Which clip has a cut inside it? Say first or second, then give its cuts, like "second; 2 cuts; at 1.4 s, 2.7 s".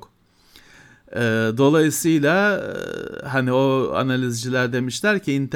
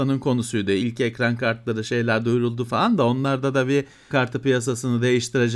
second; 1 cut; at 4.1 s